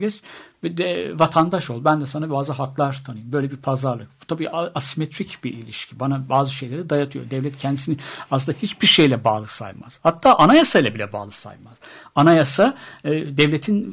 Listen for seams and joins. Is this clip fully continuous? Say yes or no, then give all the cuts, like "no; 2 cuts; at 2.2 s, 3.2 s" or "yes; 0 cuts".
yes; 0 cuts